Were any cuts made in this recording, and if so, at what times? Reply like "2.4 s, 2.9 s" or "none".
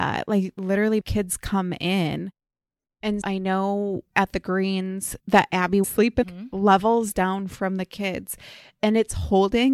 1.0 s, 3.2 s, 5.2 s, 5.8 s, 6.2 s